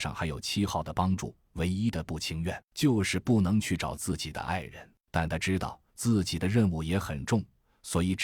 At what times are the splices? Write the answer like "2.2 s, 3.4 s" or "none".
5.0 s, 5.9 s